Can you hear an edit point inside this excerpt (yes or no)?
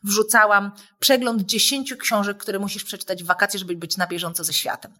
no